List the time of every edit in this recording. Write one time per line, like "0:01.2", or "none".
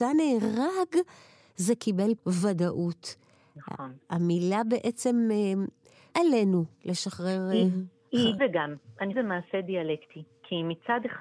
0:02.2
0:06.1
0:06.8
0:08.4
0:09.1

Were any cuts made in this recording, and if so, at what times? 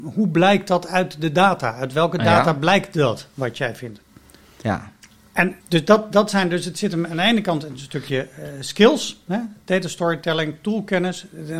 0:04.4
0:05.6

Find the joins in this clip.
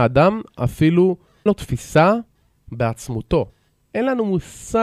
0:01.5

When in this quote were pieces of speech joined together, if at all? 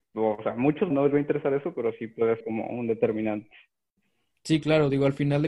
0:00.9
0:02.4

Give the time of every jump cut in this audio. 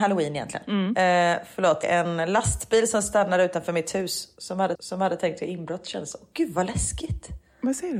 0:01.8
0:04.7

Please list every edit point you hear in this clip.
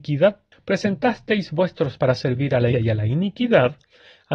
0:02.0
0:02.7

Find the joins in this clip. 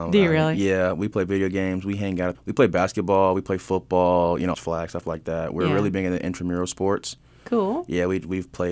0:02.3
0:04.5

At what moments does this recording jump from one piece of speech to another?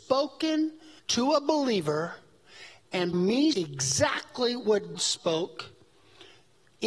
0:01.0
0:03.1
0:03.5
0:04.9

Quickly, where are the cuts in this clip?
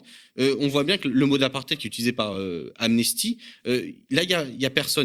none

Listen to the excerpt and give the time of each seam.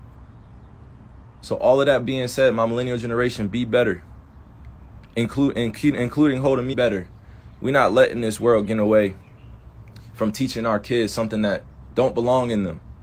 0:06.7

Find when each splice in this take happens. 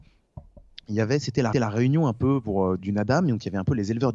0:01.5
0:02.8

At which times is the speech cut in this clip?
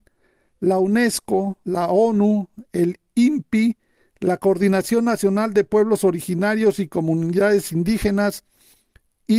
0:01.6

